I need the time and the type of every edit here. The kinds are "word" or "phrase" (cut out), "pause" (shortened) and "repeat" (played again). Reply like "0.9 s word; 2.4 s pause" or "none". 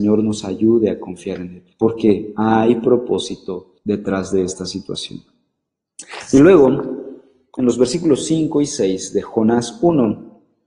1.7 s pause; 3.8 s pause